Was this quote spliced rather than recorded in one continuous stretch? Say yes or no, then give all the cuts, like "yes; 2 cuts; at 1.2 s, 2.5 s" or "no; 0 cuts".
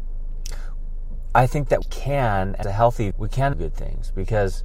yes; 4 cuts; at 1.8 s, 2.6 s, 3.1 s, 3.5 s